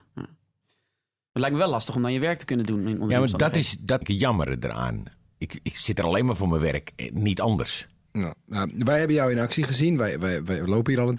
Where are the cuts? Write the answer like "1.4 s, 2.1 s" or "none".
4.0 s

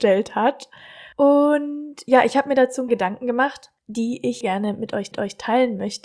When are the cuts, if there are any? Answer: 1.1 s, 2.9 s, 3.8 s, 4.4 s, 5.1 s

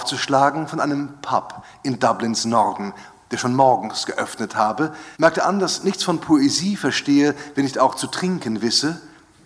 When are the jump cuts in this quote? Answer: 5.1 s

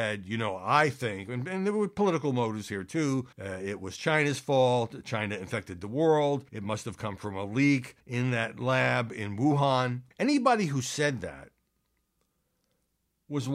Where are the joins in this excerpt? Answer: 3.3 s, 6.5 s, 8.0 s, 10.1 s

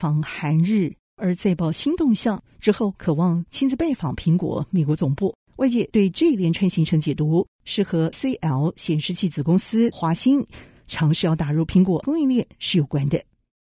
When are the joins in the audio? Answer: 8.1 s, 9.9 s, 12.0 s

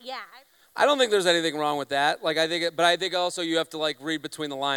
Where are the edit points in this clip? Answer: none

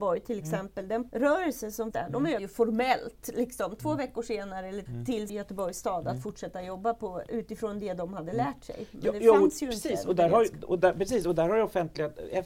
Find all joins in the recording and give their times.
1.1 s, 1.9 s, 2.4 s, 4.9 s, 5.3 s

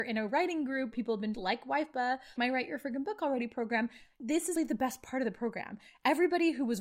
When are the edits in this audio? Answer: 0.9 s, 1.3 s, 2.4 s, 4.5 s

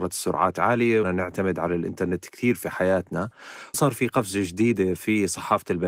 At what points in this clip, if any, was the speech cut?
1.0 s, 3.7 s

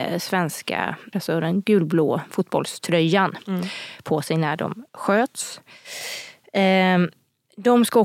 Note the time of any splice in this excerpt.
1.1 s, 4.9 s

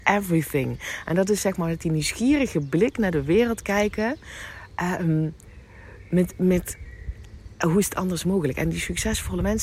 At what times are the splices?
none

